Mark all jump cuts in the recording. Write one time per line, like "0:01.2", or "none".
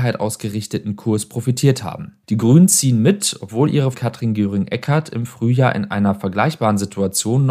0:02.2
0:03.9